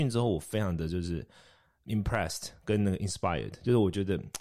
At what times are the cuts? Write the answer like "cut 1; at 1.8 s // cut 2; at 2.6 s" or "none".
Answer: none